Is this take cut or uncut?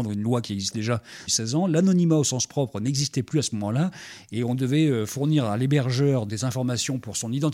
cut